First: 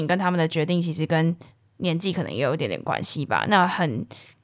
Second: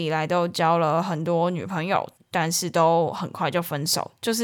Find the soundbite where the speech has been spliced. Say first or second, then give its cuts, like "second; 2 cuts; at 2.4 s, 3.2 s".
second; 1 cut; at 2.2 s